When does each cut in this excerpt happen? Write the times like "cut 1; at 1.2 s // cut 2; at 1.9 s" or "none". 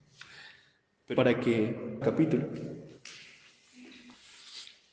cut 1; at 1.2 s // cut 2; at 2.0 s